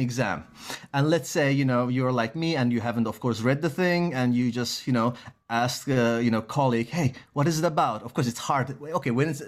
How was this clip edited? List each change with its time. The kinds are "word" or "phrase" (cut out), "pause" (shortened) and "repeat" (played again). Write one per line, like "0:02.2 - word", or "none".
none